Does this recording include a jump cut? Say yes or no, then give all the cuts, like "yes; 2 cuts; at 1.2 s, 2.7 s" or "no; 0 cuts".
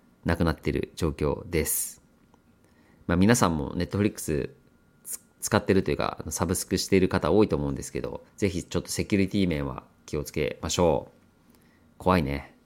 yes; 1 cut; at 8.3 s